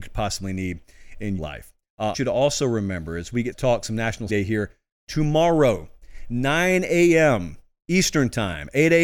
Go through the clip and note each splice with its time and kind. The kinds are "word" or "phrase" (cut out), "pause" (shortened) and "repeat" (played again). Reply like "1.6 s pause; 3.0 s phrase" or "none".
1.4 s word; 2.1 s word; 3.5 s word; 4.3 s word